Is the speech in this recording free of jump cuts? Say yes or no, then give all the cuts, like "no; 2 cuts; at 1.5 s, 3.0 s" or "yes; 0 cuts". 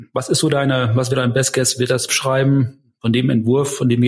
no; 2 cuts; at 1.1 s, 2.1 s